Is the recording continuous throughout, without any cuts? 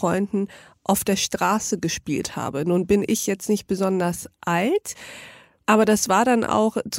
yes; 0 cuts

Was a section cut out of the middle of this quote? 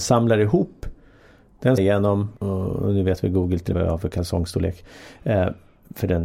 yes; 3 cuts; at 1.8 s, 2.4 s, 3.7 s

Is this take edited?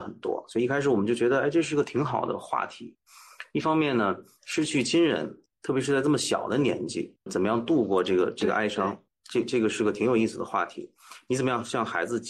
yes; 1 cut; at 7.3 s

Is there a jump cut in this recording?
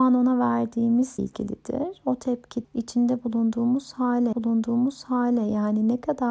yes; 3 cuts; at 1.2 s, 2.6 s, 4.3 s

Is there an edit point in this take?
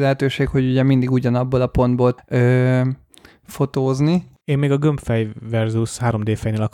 yes; 2 cuts; at 2.2 s, 4.4 s

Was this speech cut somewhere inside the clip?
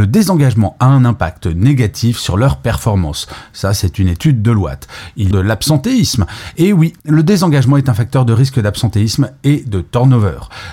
yes; 2 cuts; at 5.3 s, 7.0 s

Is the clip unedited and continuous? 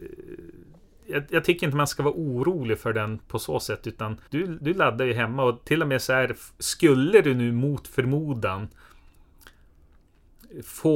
no; 1 cut; at 4.3 s

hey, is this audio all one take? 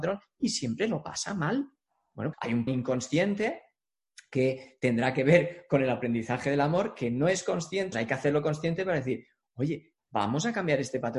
no; 3 cuts; at 2.3 s, 2.7 s, 7.9 s

